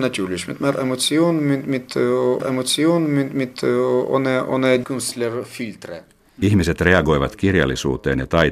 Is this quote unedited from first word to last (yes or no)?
no